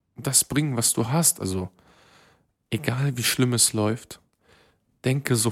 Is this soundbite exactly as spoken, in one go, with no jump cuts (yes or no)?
yes